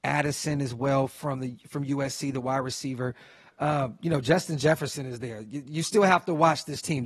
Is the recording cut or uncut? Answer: uncut